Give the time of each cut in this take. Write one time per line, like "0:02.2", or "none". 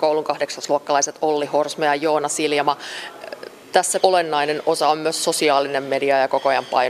0:04.0